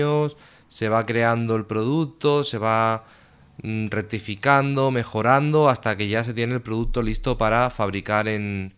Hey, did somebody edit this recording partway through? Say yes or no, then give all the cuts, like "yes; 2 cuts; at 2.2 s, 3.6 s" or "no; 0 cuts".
no; 0 cuts